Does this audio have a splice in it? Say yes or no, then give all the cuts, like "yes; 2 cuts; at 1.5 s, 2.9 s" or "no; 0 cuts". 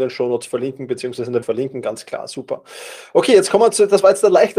yes; 1 cut; at 1.4 s